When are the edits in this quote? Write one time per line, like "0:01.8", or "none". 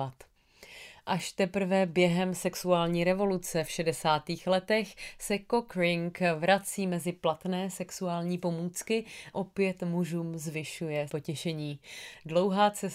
0:09.3
0:11.1